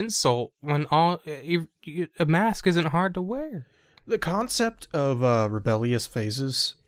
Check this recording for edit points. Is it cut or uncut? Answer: uncut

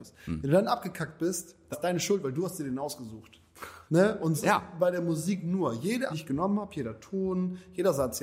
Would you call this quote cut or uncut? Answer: cut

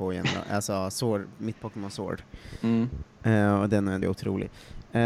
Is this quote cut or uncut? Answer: cut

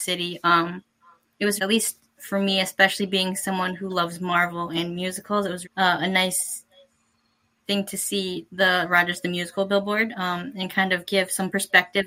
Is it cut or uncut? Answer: cut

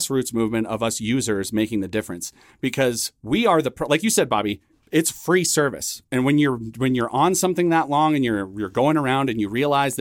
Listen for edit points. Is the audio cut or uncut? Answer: uncut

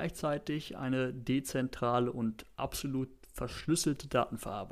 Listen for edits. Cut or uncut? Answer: uncut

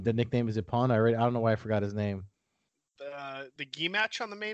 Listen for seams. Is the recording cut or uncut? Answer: cut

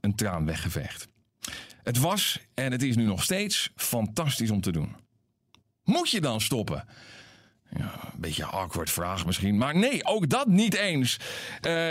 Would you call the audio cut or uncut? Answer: uncut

